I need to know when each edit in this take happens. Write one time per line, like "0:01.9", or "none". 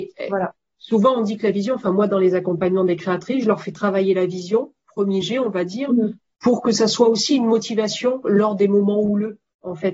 0:05.2